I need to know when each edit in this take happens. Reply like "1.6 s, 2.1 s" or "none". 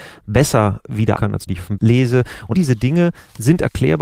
1.2 s, 1.5 s, 1.8 s, 2.5 s